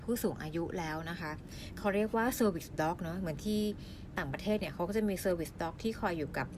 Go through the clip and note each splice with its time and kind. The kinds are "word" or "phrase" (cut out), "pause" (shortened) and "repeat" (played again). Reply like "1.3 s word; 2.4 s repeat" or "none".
none

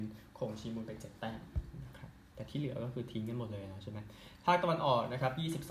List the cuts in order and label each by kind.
2.3 s pause

